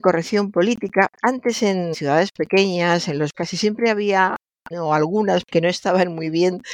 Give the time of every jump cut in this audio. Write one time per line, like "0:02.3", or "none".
0:01.9
0:03.3
0:04.7
0:05.4